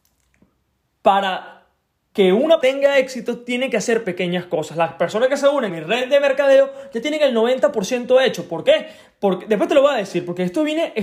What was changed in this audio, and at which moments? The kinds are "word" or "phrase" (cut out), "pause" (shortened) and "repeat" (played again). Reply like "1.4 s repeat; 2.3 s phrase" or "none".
2.6 s word; 5.7 s word